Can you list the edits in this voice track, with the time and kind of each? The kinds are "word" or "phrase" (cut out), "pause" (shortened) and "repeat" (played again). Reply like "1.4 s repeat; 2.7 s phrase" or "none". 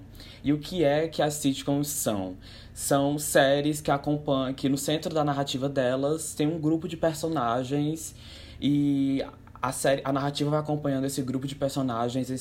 none